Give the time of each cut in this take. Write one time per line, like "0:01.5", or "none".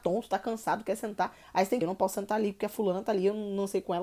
0:01.8